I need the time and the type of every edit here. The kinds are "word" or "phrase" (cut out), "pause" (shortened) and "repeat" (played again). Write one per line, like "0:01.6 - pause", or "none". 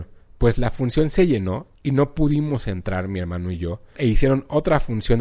0:01.7 - pause